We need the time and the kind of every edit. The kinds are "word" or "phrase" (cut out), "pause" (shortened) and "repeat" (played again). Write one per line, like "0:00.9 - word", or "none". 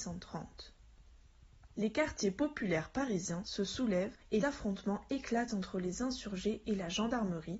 0:04.4 - word